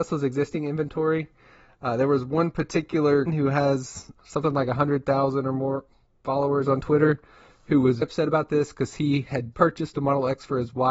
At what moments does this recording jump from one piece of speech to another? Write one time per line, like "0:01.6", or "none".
0:03.3
0:08.0
0:09.5